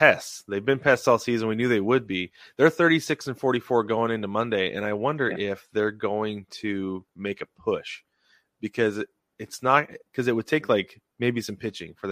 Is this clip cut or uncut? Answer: uncut